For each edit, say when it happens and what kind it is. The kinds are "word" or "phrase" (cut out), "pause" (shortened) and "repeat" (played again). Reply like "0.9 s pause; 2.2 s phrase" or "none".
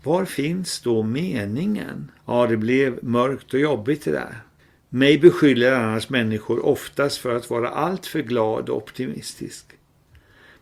2.2 s pause; 4.6 s pause